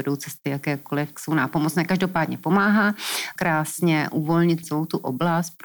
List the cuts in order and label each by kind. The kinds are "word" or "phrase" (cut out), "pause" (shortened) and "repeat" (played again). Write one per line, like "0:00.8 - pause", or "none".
0:01.1 - word
0:03.4 - word
0:04.6 - word